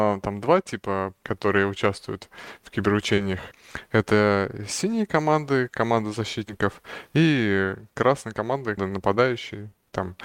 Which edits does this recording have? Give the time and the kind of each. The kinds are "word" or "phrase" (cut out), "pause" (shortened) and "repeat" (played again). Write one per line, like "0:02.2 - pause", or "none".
0:01.2 - word
0:07.9 - pause
0:08.8 - word